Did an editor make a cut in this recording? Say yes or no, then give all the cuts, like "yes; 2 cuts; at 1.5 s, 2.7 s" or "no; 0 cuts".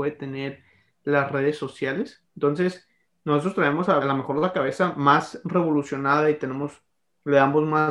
yes; 2 cuts; at 2.3 s, 4.0 s